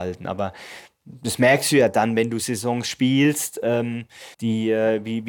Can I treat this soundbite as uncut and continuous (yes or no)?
no